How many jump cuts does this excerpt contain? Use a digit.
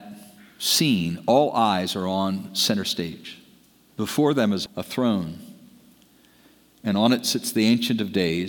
1